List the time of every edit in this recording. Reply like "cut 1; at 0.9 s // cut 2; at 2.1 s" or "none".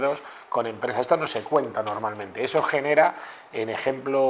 none

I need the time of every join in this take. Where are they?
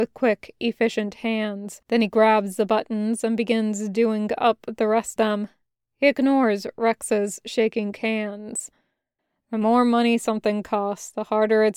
cut 1; at 1.8 s // cut 2; at 5.2 s // cut 3; at 9.2 s

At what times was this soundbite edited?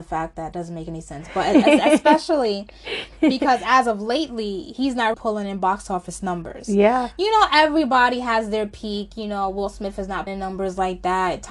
cut 1; at 5.1 s // cut 2; at 10.3 s

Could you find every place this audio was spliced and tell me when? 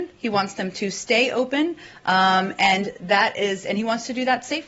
none

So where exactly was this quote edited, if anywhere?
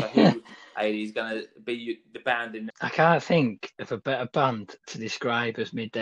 cut 1; at 2.7 s

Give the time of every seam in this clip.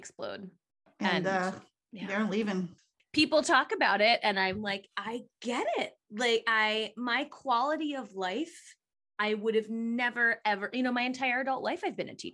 none

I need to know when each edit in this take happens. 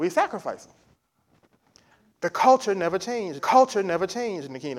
cut 1; at 3.4 s

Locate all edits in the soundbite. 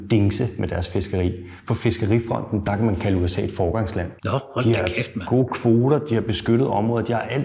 cut 1; at 4.2 s

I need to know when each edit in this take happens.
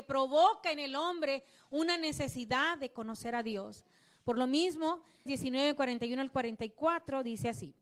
cut 1; at 5.3 s

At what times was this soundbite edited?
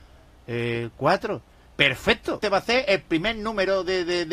cut 1; at 0.9 s // cut 2; at 2.4 s

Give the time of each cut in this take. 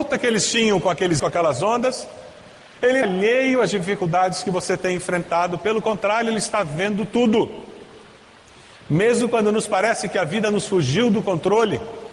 cut 1; at 1.2 s // cut 2; at 3.0 s

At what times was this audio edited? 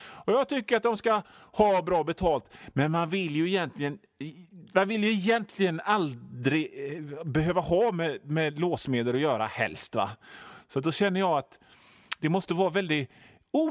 none

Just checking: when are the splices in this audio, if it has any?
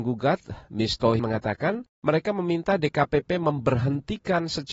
cut 1; at 1.2 s // cut 2; at 1.9 s

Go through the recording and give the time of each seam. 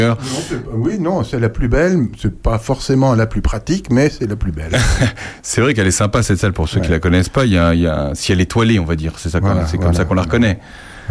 none

